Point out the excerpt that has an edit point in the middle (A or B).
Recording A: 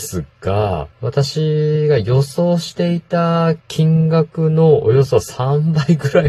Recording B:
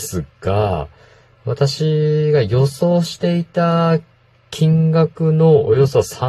A